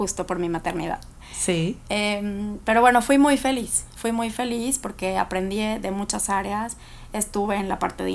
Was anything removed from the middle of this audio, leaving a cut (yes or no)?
no